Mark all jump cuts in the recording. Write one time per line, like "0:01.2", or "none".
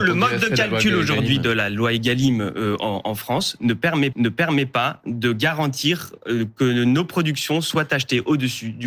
0:04.1